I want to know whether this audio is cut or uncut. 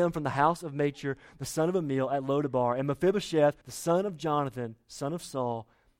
cut